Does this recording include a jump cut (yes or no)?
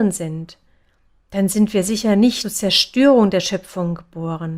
yes